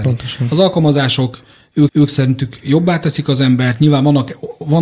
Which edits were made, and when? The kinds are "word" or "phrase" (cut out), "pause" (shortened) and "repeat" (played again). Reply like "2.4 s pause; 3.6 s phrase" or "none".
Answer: 1.9 s repeat